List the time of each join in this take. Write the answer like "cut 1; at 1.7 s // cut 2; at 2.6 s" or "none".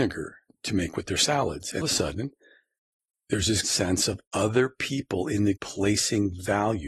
cut 1; at 1.8 s // cut 2; at 3.6 s // cut 3; at 5.6 s